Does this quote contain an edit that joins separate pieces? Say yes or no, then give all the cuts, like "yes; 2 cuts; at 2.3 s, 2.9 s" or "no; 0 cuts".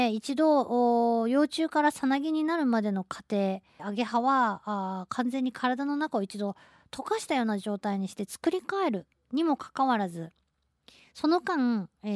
yes; 2 cuts; at 3.8 s, 9.1 s